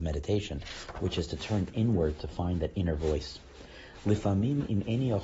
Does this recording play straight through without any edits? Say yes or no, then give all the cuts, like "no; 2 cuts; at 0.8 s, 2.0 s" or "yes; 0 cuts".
yes; 0 cuts